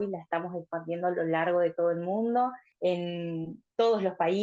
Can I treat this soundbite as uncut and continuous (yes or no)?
yes